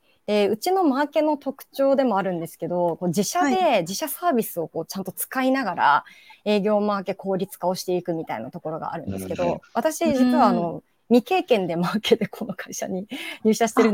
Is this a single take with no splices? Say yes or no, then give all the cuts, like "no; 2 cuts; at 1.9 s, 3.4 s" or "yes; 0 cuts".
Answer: yes; 0 cuts